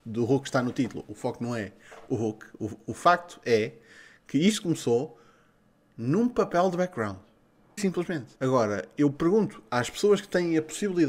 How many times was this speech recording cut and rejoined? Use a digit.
2